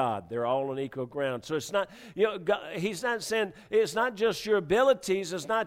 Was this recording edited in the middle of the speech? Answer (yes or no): no